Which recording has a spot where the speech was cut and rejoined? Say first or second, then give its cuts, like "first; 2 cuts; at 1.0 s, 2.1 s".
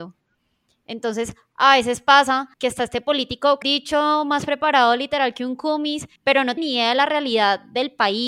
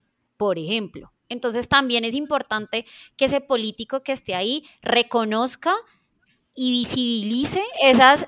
first; 4 cuts; at 2.5 s, 3.6 s, 6.2 s, 6.6 s